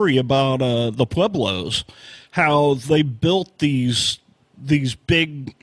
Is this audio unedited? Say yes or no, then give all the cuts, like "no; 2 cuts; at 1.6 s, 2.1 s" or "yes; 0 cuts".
yes; 0 cuts